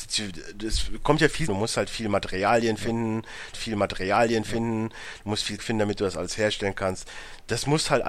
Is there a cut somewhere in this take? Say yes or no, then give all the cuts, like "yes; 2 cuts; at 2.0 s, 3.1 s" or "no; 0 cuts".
yes; 3 cuts; at 1.5 s, 3.5 s, 5.6 s